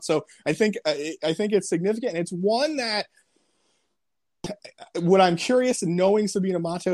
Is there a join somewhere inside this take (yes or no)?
no